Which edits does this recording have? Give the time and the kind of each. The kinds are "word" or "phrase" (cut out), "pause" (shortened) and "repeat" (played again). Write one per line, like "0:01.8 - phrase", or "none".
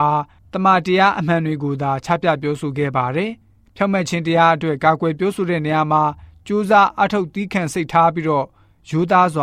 0:03.4 - pause

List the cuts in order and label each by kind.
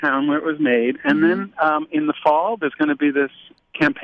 none

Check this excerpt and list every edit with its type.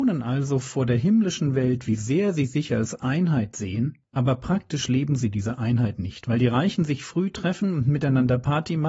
0:04.1 - pause

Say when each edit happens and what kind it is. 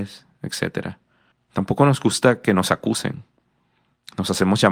0:01.3 - pause

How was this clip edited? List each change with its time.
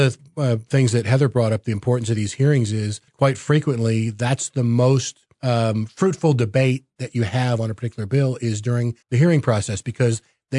0:03.1 - pause
0:05.3 - pause
0:09.0 - pause

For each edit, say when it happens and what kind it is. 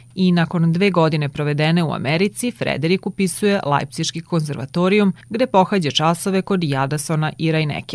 0:05.2 - pause

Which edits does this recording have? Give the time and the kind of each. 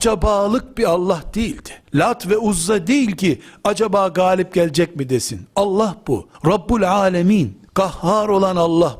0:01.8 - pause
0:06.3 - pause
0:07.7 - pause

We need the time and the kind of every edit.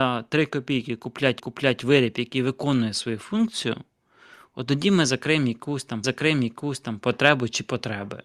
0:01.4 - repeat
0:06.0 - repeat

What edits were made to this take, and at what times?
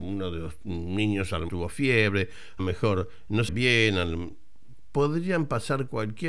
0:01.5 - word
0:02.6 - word
0:03.5 - word

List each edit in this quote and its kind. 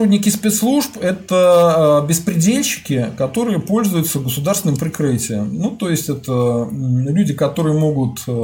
none

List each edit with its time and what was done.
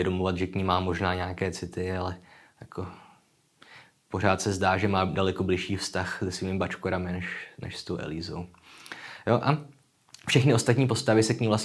none

